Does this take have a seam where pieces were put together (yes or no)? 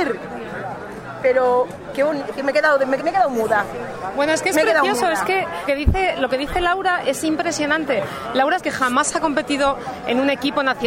yes